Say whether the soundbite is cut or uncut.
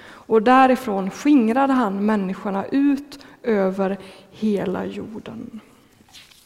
uncut